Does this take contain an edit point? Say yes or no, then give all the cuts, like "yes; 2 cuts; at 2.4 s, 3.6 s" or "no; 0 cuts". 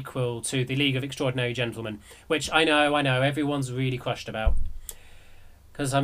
no; 0 cuts